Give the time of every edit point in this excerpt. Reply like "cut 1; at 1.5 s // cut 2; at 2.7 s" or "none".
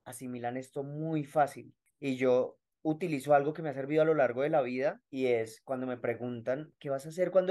none